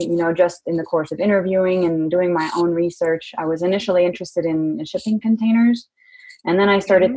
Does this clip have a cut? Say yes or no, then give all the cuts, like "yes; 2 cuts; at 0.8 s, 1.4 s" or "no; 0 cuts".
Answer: no; 0 cuts